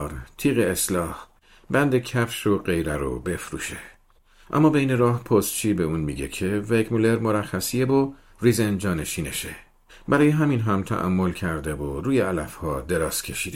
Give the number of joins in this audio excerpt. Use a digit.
0